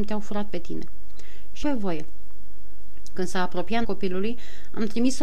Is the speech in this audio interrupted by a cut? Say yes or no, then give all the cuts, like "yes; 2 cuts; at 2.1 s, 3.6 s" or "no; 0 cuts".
yes; 2 cuts; at 1.6 s, 3.8 s